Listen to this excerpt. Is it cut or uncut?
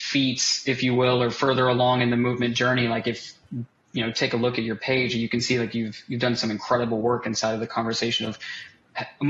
uncut